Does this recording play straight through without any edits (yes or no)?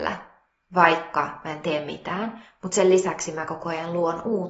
yes